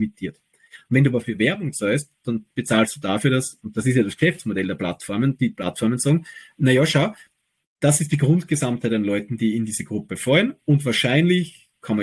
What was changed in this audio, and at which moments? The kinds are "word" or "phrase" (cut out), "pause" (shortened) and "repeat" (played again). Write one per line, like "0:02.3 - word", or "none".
none

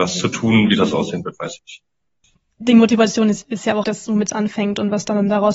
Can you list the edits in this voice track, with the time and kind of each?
0:01.6 - word
0:03.8 - word

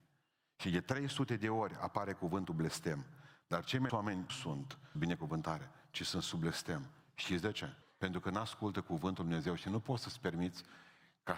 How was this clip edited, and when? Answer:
0:03.9 - word
0:04.3 - word
0:05.0 - word
0:07.8 - pause

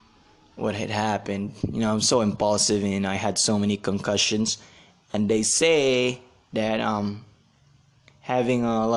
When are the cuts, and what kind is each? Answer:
none

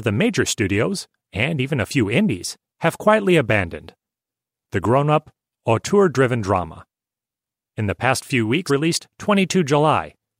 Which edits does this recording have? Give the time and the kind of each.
0:08.7 - word

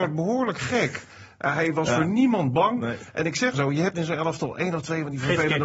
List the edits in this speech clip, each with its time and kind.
0:03.5 - word
0:03.9 - word

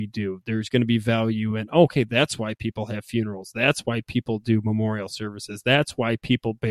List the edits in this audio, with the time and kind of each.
none

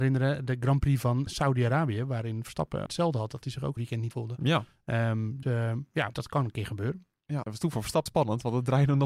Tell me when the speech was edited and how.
0:01.3 - word
0:02.9 - word
0:03.8 - word
0:04.1 - word
0:05.4 - word
0:06.1 - word
0:07.4 - word
0:08.1 - word

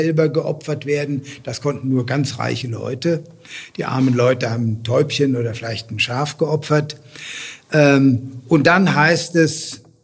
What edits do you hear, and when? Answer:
none

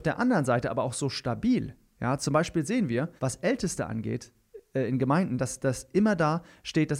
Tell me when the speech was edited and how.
0:03.2 - pause

